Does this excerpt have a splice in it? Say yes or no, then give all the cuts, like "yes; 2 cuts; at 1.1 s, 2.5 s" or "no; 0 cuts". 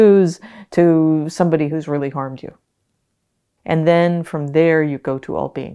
no; 0 cuts